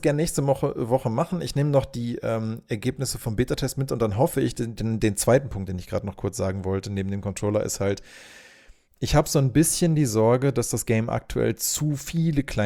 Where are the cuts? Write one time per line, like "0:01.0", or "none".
none